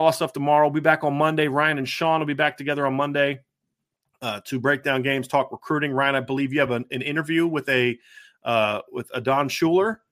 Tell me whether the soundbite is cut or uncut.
uncut